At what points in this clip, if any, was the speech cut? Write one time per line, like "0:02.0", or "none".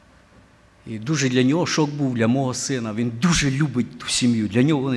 none